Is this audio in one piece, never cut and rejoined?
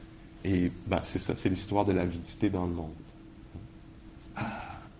yes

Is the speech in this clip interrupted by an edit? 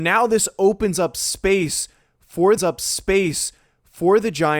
yes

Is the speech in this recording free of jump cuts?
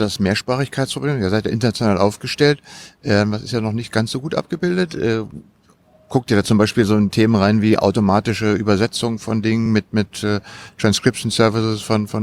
yes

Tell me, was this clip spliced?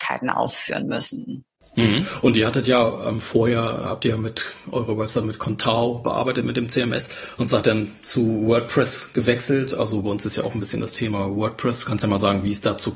no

